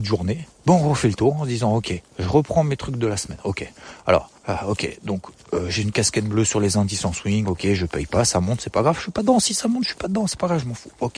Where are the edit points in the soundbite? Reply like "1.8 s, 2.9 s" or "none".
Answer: 2.1 s, 4.4 s